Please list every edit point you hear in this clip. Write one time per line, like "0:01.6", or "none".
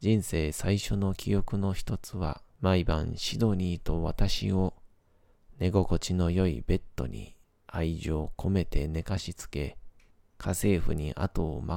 0:02.5
0:07.4
0:10.1